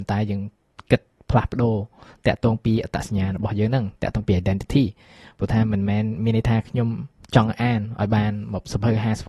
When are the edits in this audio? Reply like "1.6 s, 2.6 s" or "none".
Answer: none